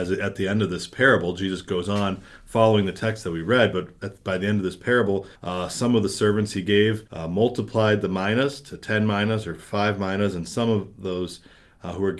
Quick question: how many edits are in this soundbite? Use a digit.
2